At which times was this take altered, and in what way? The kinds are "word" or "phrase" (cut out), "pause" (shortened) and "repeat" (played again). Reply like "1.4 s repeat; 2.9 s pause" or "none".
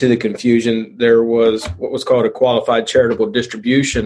none